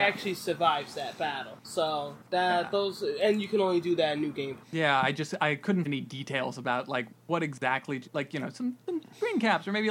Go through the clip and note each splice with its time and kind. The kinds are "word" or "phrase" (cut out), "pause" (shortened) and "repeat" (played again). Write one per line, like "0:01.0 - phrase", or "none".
0:02.3 - pause
0:04.6 - pause
0:05.9 - word